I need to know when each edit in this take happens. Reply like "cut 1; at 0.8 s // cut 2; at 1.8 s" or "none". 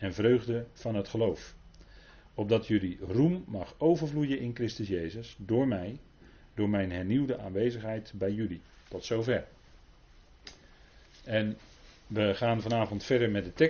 none